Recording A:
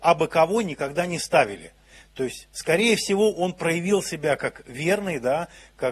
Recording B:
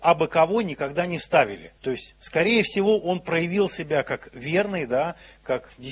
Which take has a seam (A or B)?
B